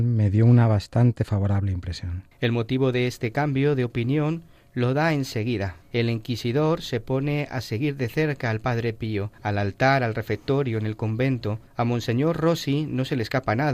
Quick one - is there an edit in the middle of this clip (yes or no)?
yes